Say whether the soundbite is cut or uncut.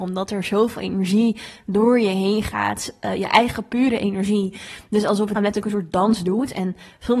cut